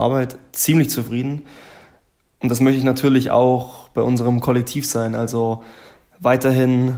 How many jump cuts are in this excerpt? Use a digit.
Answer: 0